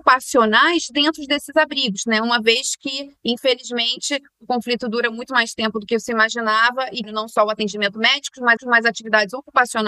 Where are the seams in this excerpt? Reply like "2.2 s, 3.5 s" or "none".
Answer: 7.0 s, 8.6 s